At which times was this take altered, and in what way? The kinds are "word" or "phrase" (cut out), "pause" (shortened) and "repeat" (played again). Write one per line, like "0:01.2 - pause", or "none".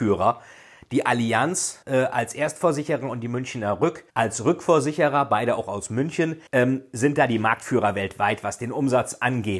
0:01.8 - pause
0:04.1 - pause
0:06.5 - pause